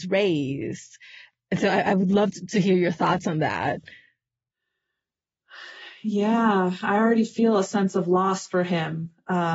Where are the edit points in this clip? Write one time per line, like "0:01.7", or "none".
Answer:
none